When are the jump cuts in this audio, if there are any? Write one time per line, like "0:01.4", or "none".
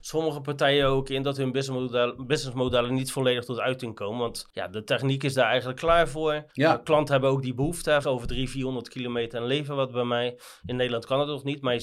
0:04.5
0:06.5
0:08.0